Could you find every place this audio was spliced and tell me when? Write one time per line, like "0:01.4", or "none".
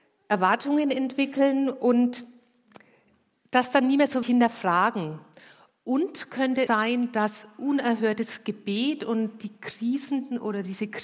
0:04.2
0:06.7